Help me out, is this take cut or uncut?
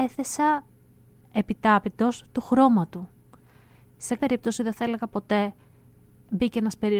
cut